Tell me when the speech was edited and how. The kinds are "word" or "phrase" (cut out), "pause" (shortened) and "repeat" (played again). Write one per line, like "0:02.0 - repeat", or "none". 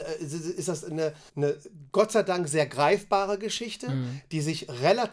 0:01.3 - word